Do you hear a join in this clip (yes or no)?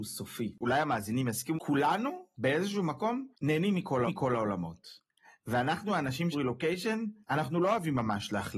yes